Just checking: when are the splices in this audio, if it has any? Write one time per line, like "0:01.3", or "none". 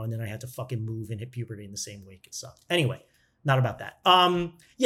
none